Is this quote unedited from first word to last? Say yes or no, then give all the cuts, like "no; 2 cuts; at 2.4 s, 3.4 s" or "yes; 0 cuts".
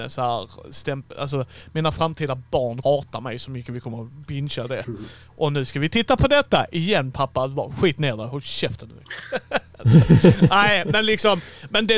no; 1 cut; at 2.8 s